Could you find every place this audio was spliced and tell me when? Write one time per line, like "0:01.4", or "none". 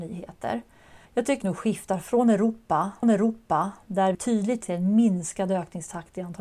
0:01.1
0:01.4
0:03.0
0:04.1
0:04.6